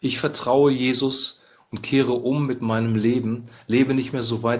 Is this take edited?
no; 0 cuts

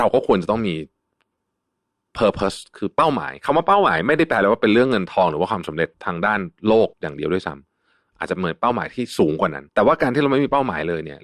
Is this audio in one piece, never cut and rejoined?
no; 4 cuts; at 5.9 s, 6.6 s, 6.9 s, 9.7 s

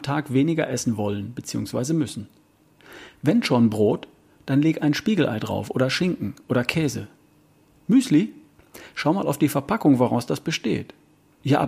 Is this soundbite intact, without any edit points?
yes; 0 cuts

